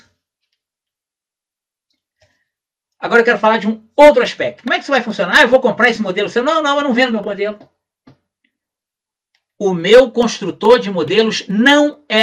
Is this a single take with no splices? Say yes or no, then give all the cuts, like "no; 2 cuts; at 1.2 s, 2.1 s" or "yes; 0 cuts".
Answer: yes; 0 cuts